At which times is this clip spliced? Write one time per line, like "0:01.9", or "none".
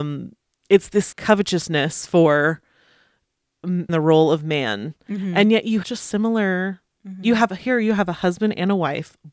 0:01.1
0:03.9
0:05.8